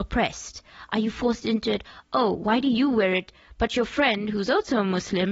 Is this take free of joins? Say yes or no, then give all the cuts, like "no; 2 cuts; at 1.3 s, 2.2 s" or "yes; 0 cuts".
yes; 0 cuts